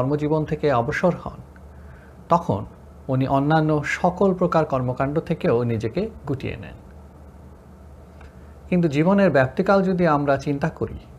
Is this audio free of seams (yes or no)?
yes